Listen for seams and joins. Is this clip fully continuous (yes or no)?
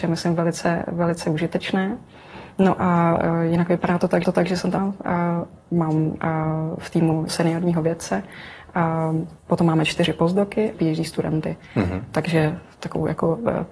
no